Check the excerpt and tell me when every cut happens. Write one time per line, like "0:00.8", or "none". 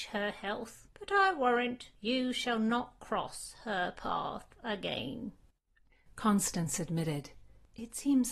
none